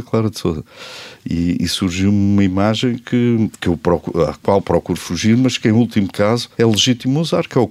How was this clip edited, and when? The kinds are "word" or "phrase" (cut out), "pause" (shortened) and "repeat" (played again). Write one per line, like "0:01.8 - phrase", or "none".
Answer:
0:06.5 - pause